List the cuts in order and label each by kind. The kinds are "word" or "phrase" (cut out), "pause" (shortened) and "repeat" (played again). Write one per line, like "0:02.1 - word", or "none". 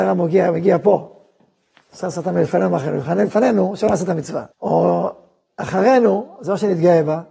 0:04.5 - pause